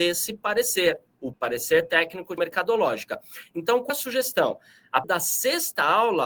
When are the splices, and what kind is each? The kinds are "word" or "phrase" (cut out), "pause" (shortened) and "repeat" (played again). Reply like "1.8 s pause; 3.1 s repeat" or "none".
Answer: 1.3 s word; 2.4 s word; 3.9 s word; 5.0 s word